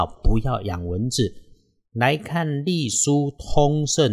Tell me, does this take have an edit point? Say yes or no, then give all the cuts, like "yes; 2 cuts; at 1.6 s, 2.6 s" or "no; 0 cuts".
no; 0 cuts